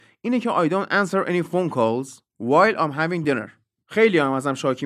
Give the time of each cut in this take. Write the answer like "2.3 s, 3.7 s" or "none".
none